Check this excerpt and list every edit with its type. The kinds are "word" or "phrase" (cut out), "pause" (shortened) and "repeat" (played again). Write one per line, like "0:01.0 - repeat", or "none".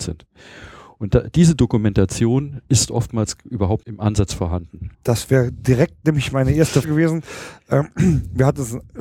0:03.8 - word
0:04.9 - pause
0:06.8 - word